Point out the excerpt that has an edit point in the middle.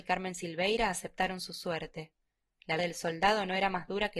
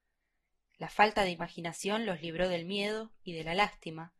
first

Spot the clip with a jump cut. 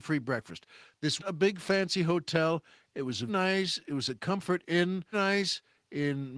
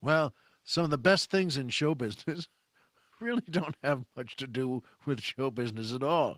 first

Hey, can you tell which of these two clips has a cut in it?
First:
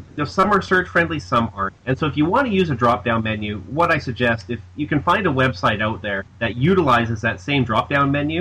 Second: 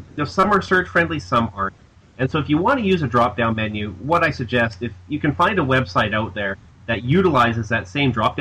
first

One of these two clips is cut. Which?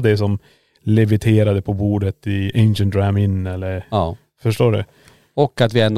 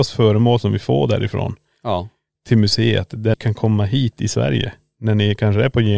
second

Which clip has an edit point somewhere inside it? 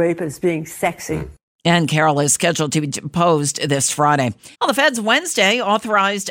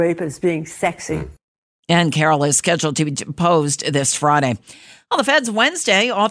first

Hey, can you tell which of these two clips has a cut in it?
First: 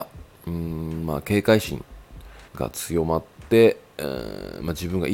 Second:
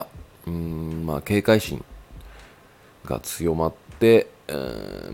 first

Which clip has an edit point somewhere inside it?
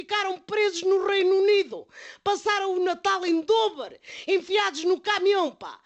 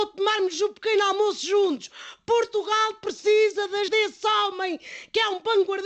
second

